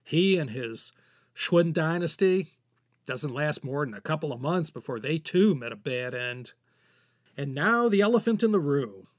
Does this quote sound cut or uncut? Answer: uncut